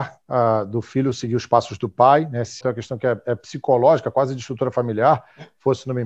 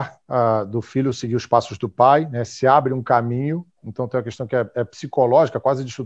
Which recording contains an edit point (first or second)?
first